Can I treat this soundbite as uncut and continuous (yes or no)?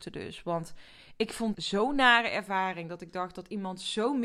no